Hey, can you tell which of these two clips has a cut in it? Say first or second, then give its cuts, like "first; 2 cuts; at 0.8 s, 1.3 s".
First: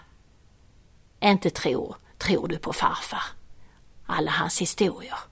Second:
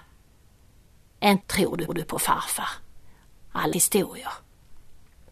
second; 3 cuts; at 1.4 s, 1.9 s, 3.7 s